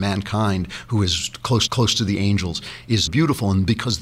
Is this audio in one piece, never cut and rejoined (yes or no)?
no